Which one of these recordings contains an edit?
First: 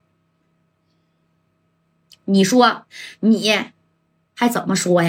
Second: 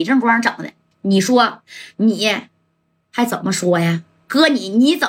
second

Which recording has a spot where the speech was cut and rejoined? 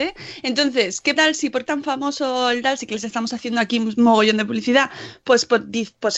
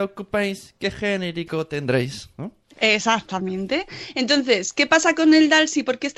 first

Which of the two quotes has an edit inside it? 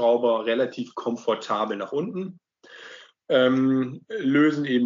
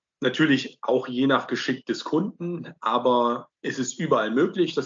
second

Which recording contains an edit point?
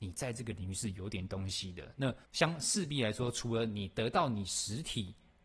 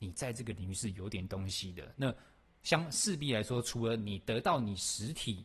first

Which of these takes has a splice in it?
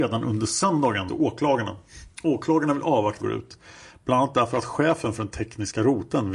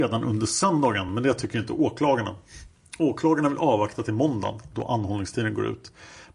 first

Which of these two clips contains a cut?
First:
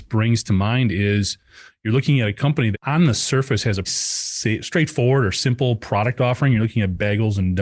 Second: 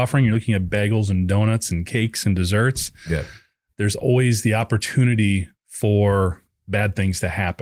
first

